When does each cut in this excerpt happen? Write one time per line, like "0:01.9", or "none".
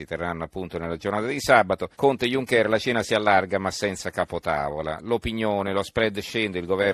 0:01.9

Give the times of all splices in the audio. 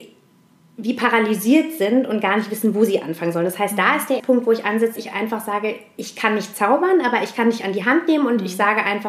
0:04.2
0:05.0

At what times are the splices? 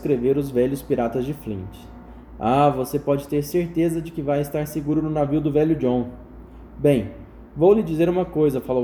none

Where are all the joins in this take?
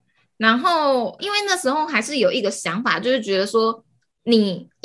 0:01.2

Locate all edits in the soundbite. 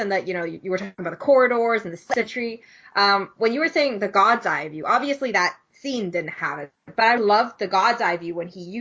0:01.0
0:07.2

